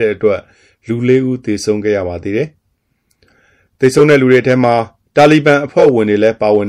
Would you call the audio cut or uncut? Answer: uncut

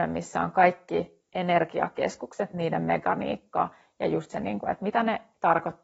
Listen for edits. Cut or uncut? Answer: uncut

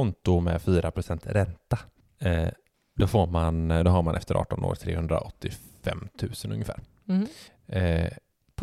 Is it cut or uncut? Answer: uncut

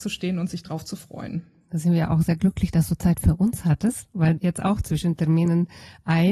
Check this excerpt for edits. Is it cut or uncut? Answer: cut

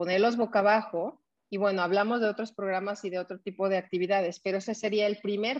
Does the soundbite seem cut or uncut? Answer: uncut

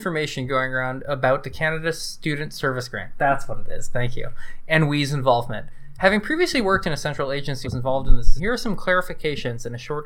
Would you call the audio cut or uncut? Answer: cut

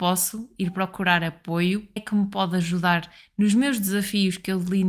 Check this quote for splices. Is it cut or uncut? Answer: cut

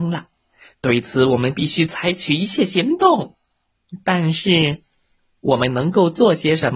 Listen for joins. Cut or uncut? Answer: uncut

